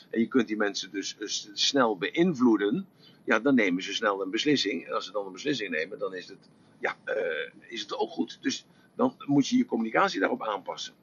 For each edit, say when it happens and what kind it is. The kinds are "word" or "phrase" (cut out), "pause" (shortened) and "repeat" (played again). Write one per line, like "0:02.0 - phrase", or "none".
none

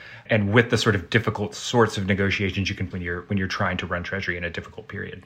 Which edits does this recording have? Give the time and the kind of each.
0:02.9 - word

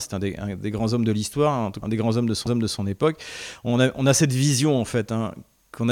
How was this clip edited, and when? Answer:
0:01.8 - word
0:02.5 - repeat

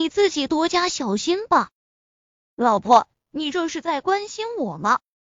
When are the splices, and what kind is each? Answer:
0:01.8 - pause

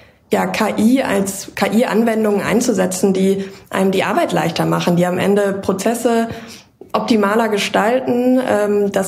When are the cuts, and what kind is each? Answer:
none

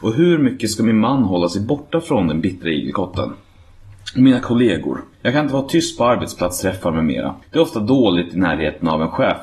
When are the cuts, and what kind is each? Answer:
0:05.1 - pause
0:07.4 - pause

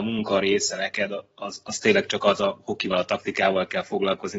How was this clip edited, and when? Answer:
none

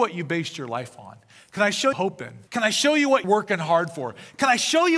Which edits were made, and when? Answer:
0:01.9 - phrase
0:02.5 - pause
0:03.2 - word

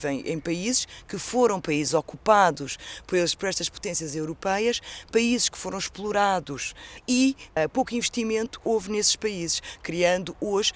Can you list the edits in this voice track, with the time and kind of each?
none

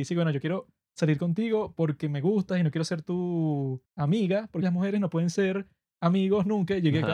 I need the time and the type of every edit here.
0:03.9 - pause
0:04.6 - phrase

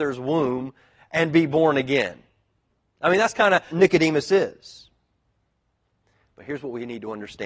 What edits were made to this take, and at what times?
0:03.7 - word

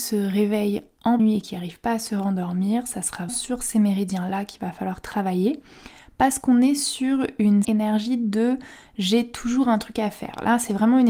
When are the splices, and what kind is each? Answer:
0:01.2 - word
0:03.3 - word
0:07.6 - word

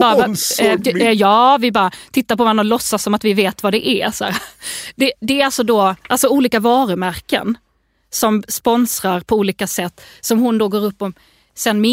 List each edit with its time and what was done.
none

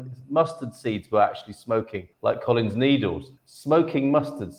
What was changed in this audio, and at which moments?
0:02.1 - pause
0:03.4 - pause

